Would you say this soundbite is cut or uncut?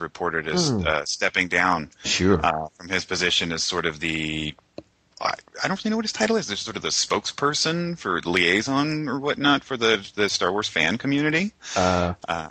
uncut